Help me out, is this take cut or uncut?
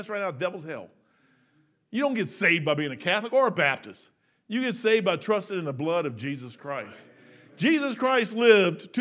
uncut